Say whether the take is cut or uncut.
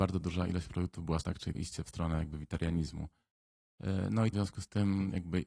cut